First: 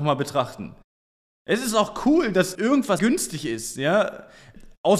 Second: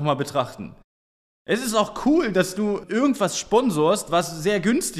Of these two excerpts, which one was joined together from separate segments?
first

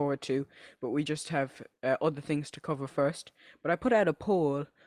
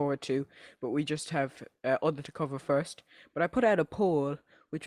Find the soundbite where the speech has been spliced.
second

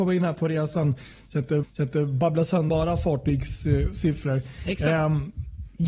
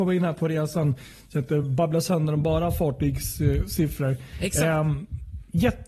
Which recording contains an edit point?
first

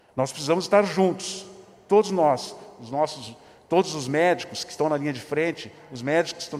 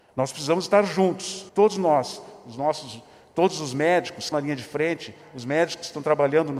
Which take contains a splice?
second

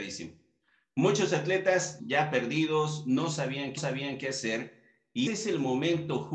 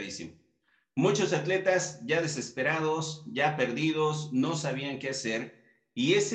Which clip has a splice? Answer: first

